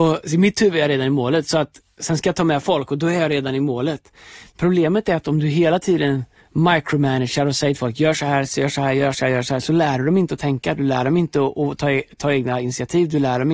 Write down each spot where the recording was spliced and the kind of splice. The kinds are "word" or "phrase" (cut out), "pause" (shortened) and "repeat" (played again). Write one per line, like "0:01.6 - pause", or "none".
none